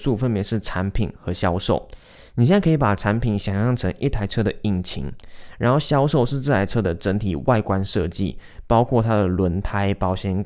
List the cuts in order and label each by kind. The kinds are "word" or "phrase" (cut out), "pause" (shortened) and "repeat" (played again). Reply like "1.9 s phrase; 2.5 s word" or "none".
none